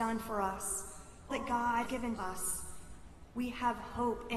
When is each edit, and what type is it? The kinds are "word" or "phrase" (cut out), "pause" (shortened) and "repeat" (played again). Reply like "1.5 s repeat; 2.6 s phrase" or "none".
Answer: 1.3 s word; 1.9 s word; 2.2 s word